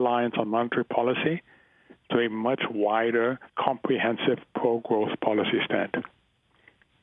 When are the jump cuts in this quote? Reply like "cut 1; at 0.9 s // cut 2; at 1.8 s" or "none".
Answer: cut 1; at 3.5 s